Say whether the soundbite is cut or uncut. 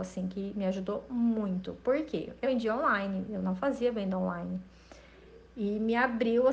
cut